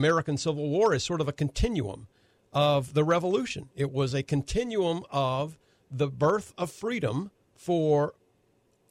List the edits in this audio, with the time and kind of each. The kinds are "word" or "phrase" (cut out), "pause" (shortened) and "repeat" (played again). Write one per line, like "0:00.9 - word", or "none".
none